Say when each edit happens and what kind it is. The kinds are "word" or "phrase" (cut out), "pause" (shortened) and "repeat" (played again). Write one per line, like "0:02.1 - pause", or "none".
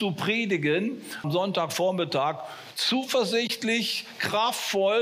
0:01.2 - word